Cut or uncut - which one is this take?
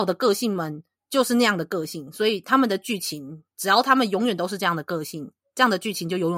cut